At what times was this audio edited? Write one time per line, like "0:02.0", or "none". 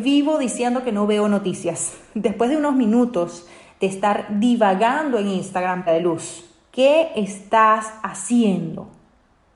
0:05.9